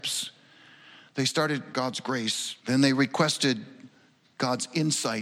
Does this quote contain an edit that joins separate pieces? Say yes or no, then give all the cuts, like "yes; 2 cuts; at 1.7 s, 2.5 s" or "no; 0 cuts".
yes; 2 cuts; at 1.7 s, 2.6 s